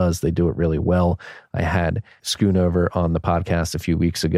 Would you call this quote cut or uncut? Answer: cut